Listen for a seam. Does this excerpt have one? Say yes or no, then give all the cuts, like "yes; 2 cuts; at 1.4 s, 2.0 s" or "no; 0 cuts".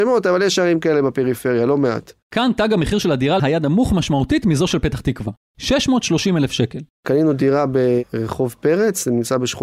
yes; 1 cut; at 3.4 s